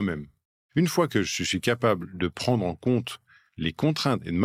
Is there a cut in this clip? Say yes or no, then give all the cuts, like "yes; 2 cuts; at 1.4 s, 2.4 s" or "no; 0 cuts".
no; 0 cuts